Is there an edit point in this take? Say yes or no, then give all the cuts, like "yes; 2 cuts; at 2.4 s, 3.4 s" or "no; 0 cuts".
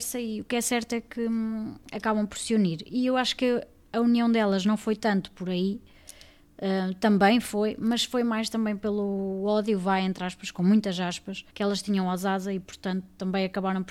yes; 1 cut; at 11.5 s